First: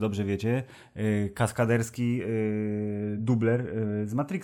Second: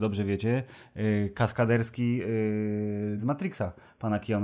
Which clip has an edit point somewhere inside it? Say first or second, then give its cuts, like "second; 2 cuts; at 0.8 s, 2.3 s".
second; 1 cut; at 3.2 s